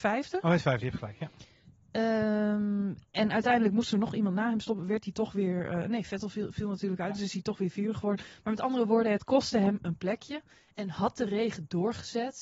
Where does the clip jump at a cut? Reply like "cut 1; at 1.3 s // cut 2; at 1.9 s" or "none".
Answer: none